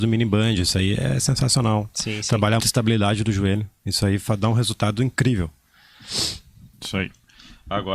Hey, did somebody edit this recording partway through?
yes; 2 cuts; at 2.6 s, 6.7 s

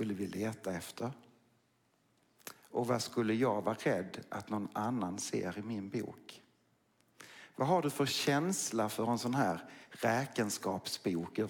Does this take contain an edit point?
no; 0 cuts

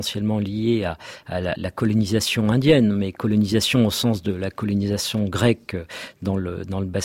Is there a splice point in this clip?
yes; 1 cut; at 1.6 s

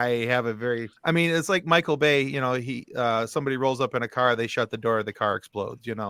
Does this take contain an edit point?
yes; 1 cut; at 1.0 s

